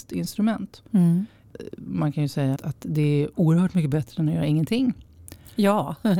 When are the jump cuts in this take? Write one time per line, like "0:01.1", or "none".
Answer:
0:02.6